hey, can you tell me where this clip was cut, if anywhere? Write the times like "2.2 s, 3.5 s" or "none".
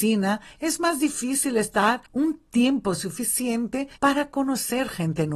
2.1 s, 4.0 s